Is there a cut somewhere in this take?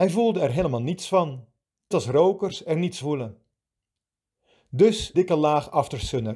yes; 3 cuts; at 1.9 s, 3.0 s, 5.1 s

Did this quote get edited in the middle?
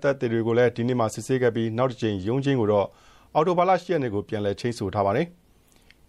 no; 0 cuts

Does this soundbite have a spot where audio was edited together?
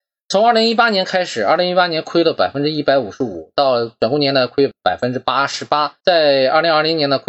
yes; 1 cut; at 6.0 s

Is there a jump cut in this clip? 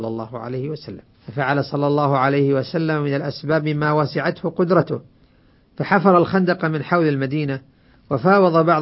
yes; 1 cut; at 1.1 s

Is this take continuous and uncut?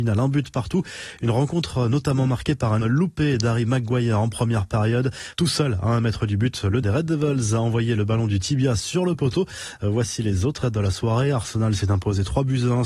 no; 3 cuts; at 2.8 s, 6.8 s, 10.6 s

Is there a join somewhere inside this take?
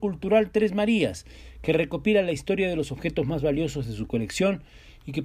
no; 0 cuts

